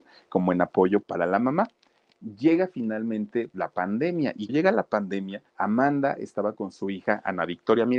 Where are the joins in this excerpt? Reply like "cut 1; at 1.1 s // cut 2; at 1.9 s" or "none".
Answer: cut 1; at 1.0 s // cut 2; at 3.5 s // cut 3; at 4.5 s // cut 4; at 5.5 s

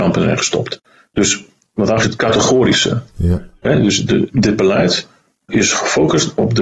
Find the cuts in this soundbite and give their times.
cut 1; at 2.0 s

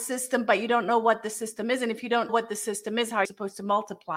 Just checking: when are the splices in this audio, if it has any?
cut 1; at 2.3 s // cut 2; at 3.2 s

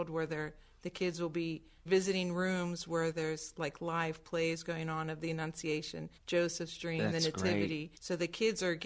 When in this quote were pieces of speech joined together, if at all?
cut 1; at 1.9 s // cut 2; at 6.2 s // cut 3; at 8.0 s

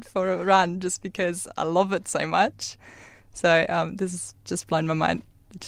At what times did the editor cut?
none

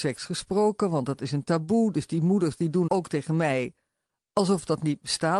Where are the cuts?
cut 1; at 2.9 s

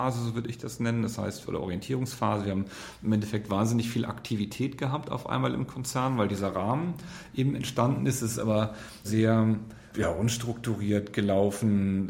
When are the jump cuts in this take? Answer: cut 1; at 9.0 s // cut 2; at 9.9 s

